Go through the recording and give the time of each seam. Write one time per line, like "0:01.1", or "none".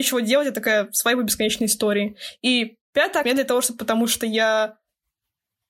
0:03.2
0:03.8